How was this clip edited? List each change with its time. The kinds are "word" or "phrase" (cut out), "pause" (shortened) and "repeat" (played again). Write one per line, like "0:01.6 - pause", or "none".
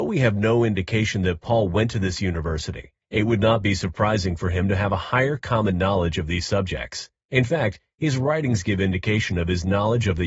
0:03.0 - pause